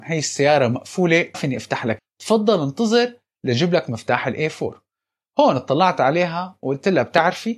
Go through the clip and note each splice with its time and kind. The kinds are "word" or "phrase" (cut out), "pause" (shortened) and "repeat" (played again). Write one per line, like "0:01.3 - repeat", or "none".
0:01.3 - word
0:02.0 - word